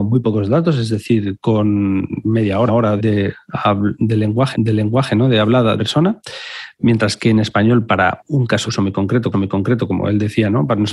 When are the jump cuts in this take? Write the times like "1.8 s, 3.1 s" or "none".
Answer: 2.7 s, 3.0 s, 4.5 s, 5.8 s, 8.7 s, 9.3 s